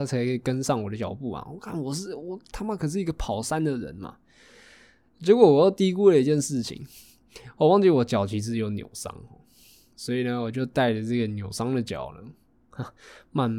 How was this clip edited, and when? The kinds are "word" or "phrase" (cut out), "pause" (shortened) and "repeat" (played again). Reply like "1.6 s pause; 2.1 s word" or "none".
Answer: none